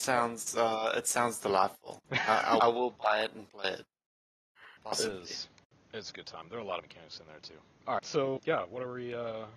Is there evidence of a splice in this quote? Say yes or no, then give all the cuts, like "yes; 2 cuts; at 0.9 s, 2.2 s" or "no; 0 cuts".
yes; 6 cuts; at 2.6 s, 4.8 s, 5.7 s, 6.8 s, 8.0 s, 8.4 s